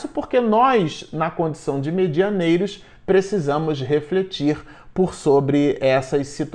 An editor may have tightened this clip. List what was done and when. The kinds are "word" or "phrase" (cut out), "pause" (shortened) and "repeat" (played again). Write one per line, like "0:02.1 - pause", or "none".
none